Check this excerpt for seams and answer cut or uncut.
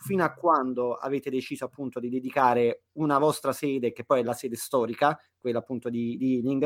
uncut